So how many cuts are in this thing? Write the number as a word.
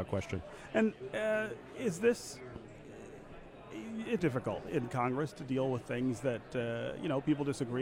one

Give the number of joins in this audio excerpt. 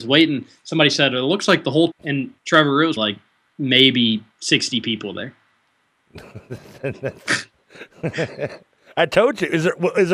four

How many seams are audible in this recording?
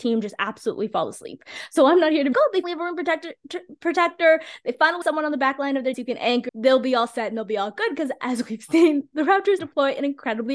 six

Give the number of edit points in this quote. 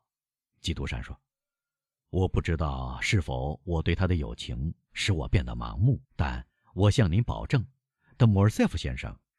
one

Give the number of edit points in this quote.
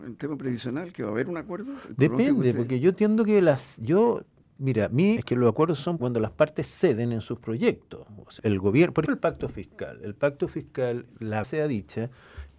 five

